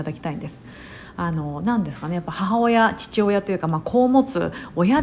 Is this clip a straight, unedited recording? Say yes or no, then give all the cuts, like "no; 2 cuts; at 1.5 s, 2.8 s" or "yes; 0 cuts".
yes; 0 cuts